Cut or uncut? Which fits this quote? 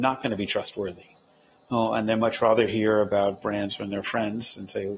uncut